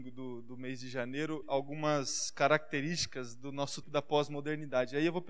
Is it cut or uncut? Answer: cut